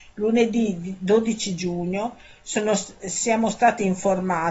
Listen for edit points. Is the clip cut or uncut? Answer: uncut